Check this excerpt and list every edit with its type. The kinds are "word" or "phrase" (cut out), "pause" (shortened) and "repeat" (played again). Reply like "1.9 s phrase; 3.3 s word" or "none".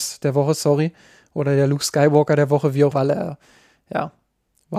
2.9 s phrase